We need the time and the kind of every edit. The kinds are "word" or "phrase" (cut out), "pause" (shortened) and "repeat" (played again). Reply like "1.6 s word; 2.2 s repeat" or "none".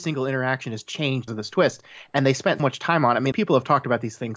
1.3 s word; 2.6 s word; 3.3 s word